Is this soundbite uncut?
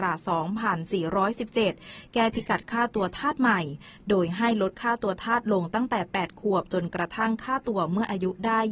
yes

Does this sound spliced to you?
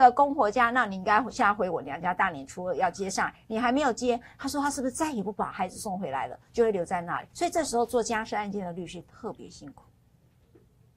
yes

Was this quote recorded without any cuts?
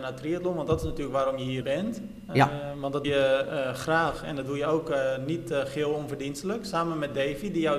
no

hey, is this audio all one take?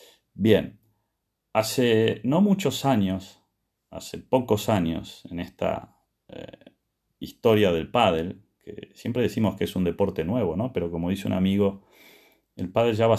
yes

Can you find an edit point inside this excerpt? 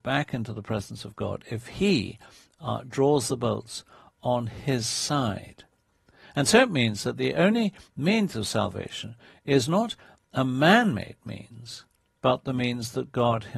no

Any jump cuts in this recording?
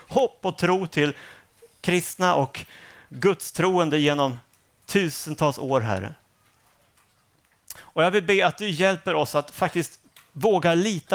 no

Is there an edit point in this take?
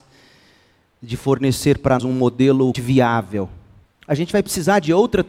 yes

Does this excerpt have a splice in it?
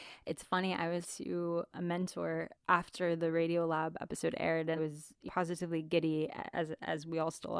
yes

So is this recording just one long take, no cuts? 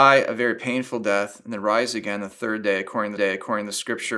no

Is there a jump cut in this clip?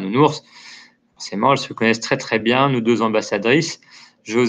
no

